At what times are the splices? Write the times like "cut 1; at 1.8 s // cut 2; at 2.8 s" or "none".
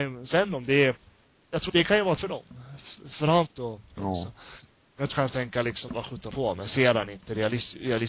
cut 1; at 1.7 s // cut 2; at 2.2 s // cut 3; at 3.1 s // cut 4; at 3.5 s // cut 5; at 4.0 s // cut 6; at 5.1 s // cut 7; at 5.9 s // cut 8; at 6.3 s